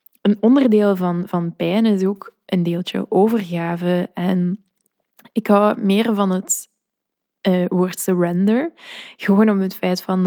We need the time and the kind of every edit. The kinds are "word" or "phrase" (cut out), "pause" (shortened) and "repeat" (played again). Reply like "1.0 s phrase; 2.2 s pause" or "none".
none